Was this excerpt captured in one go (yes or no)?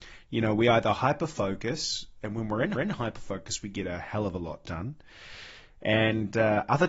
no